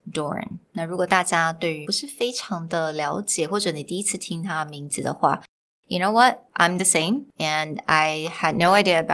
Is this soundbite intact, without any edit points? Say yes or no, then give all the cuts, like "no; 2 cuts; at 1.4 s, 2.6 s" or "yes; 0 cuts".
no; 1 cut; at 1.8 s